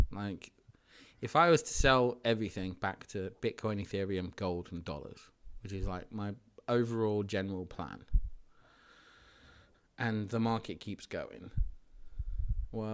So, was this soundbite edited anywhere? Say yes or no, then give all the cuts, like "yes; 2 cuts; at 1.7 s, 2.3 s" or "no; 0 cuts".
no; 0 cuts